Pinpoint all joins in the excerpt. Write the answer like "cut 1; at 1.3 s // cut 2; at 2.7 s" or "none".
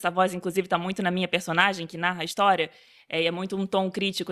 none